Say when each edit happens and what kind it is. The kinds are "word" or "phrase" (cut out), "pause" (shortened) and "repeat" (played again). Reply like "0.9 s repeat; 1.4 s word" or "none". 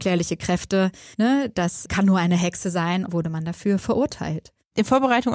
1.1 s pause; 1.8 s word; 3.1 s phrase